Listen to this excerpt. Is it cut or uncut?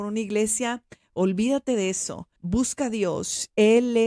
cut